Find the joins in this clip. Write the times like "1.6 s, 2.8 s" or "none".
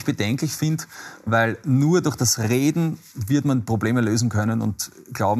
none